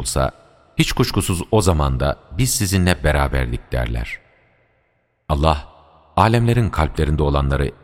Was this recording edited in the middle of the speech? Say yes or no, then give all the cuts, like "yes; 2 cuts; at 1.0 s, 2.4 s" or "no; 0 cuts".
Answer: no; 0 cuts